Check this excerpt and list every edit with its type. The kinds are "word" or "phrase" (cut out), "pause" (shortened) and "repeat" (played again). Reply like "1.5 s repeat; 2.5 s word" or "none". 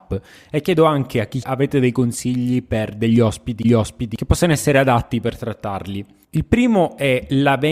1.4 s phrase; 3.6 s repeat